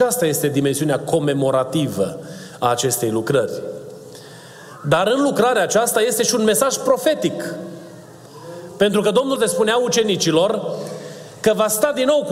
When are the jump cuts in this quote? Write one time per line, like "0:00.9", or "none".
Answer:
0:09.4